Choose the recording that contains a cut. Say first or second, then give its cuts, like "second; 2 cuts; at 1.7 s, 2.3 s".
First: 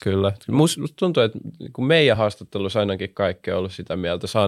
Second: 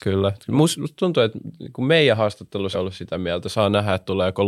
second; 1 cut; at 2.7 s